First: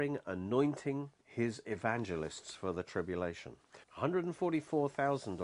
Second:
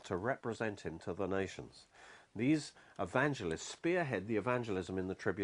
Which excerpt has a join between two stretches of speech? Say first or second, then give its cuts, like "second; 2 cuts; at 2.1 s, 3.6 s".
first; 2 cuts; at 1.2 s, 3.8 s